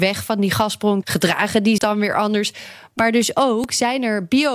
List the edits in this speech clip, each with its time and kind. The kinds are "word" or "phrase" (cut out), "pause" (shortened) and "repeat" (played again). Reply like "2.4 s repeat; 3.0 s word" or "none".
1.0 s word; 1.8 s word